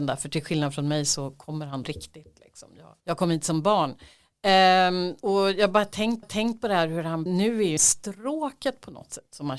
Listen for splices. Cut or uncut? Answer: cut